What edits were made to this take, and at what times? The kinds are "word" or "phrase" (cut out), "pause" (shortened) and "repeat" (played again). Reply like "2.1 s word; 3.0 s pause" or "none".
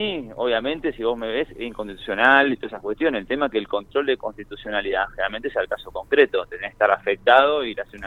none